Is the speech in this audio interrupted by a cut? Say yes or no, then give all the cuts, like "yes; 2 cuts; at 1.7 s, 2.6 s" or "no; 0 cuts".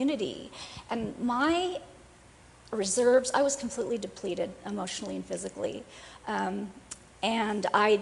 no; 0 cuts